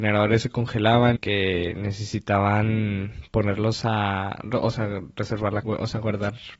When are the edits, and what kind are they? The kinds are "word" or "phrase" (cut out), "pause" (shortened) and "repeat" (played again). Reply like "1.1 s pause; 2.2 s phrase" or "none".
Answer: 1.2 s word; 5.6 s word